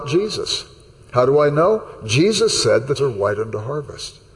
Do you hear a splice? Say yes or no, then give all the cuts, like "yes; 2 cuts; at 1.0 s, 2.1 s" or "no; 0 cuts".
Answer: yes; 1 cut; at 3.0 s